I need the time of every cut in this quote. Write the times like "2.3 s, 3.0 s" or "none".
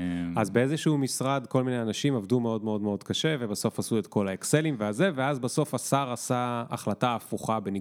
none

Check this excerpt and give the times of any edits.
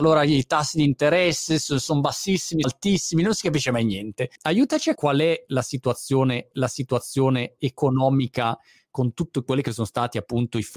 2.6 s, 4.4 s, 4.9 s, 6.5 s

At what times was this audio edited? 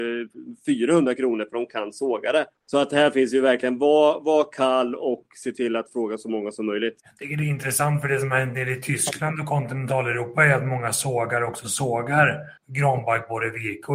2.5 s, 7.0 s, 12.6 s

